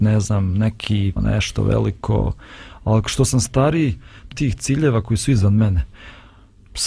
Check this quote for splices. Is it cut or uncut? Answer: cut